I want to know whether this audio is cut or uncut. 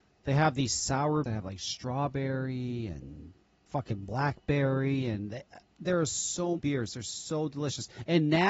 cut